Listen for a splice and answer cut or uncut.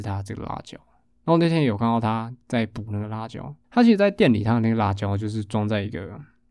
cut